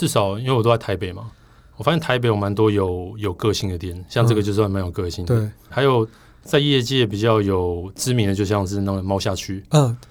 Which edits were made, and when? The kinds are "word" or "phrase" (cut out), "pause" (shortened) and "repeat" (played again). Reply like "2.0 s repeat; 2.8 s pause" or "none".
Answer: 5.7 s word